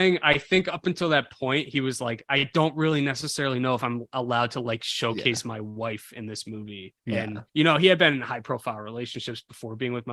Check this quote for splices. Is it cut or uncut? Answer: cut